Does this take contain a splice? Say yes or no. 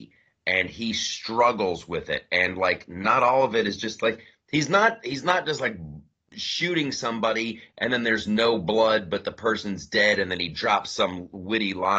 no